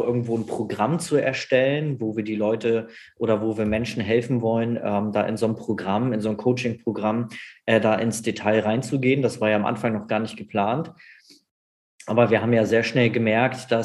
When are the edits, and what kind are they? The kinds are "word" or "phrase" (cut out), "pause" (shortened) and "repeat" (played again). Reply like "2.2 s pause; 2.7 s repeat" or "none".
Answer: none